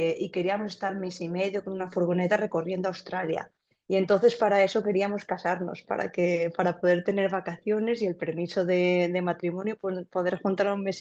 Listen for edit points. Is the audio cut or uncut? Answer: uncut